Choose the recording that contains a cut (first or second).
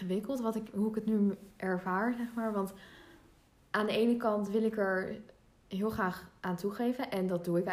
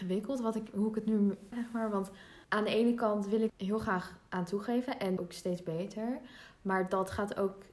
second